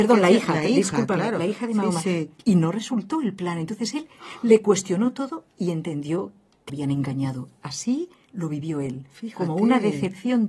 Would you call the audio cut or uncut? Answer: cut